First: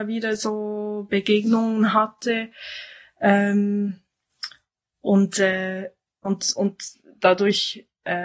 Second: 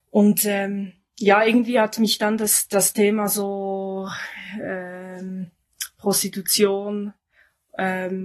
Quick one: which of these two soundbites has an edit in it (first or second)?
first